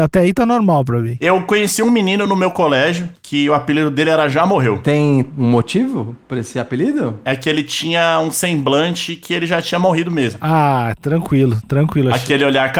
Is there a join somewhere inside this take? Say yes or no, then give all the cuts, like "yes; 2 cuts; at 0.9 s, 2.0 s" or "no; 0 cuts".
no; 0 cuts